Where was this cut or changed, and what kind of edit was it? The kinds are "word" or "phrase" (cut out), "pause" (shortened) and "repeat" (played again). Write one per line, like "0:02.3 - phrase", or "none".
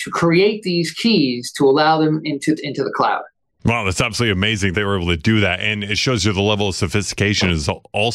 0:02.6 - phrase
0:04.7 - word